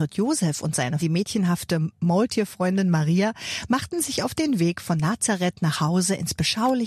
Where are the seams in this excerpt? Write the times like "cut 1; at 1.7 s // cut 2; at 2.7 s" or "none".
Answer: cut 1; at 1.0 s